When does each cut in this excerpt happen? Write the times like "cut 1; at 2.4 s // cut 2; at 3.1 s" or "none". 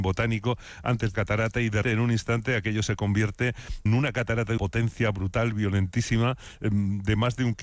cut 1; at 1.1 s // cut 2; at 1.8 s // cut 3; at 3.9 s // cut 4; at 4.6 s